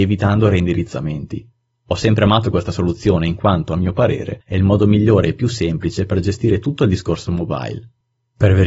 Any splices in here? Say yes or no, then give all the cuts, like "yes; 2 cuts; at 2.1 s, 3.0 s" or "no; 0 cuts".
no; 0 cuts